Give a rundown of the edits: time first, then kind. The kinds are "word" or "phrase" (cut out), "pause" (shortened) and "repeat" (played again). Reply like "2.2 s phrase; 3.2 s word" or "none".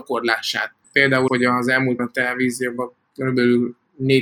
1.3 s word; 2.0 s word